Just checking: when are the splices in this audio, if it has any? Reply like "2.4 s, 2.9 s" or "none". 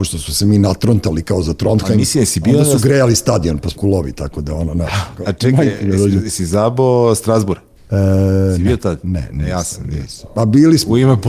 3.7 s, 5.2 s, 7.8 s

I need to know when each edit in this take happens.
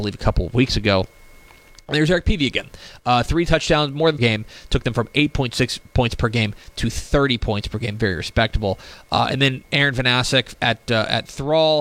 4.2 s, 9.6 s

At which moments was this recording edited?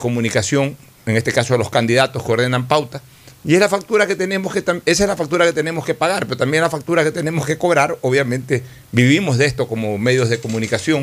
none

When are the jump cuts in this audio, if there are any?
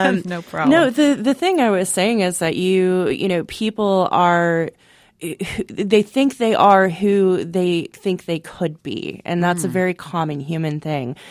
none

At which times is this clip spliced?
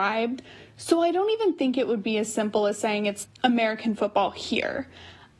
3.2 s

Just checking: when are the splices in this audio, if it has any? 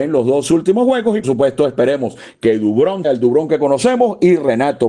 1.2 s, 3.0 s

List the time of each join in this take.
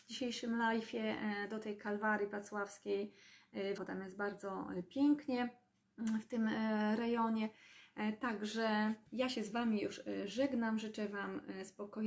3.8 s, 5.8 s, 9.1 s

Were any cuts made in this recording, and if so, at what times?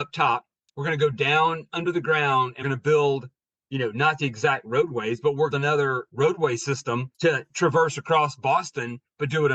2.6 s, 5.5 s

